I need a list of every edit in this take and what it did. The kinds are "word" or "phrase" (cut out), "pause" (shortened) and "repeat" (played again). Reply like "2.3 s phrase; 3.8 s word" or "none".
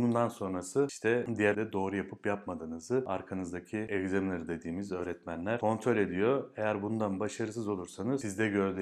1.5 s word